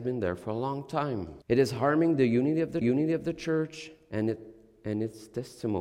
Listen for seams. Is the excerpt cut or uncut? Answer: cut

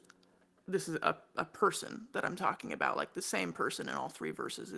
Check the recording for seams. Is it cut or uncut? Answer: uncut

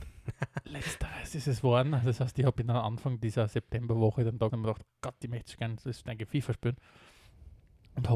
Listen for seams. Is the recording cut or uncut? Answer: cut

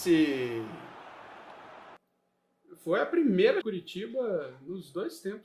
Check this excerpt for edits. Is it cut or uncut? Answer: cut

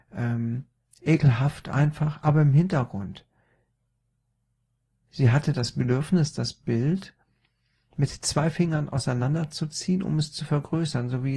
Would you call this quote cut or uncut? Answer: uncut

